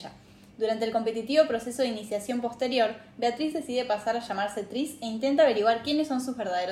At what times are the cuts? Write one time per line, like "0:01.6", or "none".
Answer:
none